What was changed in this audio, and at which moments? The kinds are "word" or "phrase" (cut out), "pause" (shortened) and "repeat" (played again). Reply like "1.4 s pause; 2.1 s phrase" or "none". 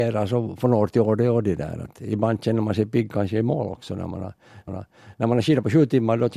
4.7 s repeat

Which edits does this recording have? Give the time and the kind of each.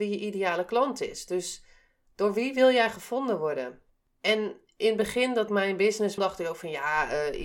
5.5 s word; 6.2 s word

